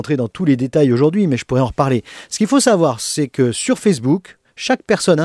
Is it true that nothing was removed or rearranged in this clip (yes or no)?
yes